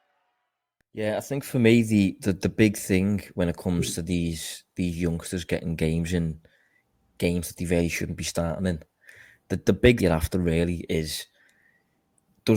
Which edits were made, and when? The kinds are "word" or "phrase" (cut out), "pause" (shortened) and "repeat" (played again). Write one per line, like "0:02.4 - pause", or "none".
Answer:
0:10.0 - phrase